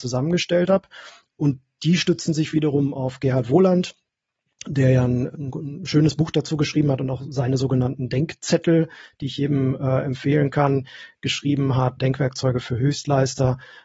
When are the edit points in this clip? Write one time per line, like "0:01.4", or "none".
none